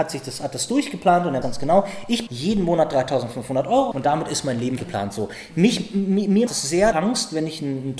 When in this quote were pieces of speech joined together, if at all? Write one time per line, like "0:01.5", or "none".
0:01.4
0:02.3
0:03.9
0:04.8
0:06.5
0:06.9

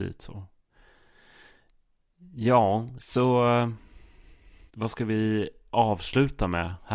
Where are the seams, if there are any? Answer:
0:04.7

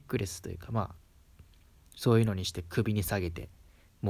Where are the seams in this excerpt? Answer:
none

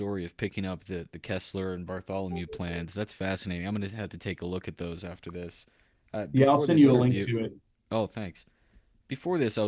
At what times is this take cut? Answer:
none

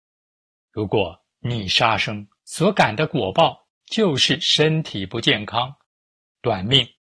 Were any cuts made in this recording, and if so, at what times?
0:01.3
0:02.4

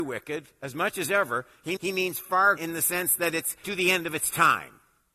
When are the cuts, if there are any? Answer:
0:01.8
0:02.6
0:03.6

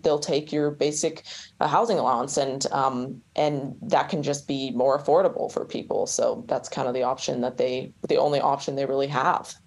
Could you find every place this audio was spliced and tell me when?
0:03.3
0:08.0

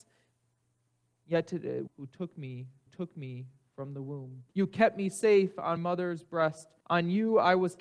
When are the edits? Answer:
0:01.9
0:02.9
0:04.5
0:05.8
0:06.8

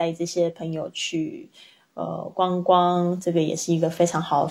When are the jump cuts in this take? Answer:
none

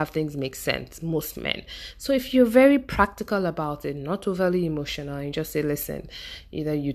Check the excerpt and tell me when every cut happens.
none

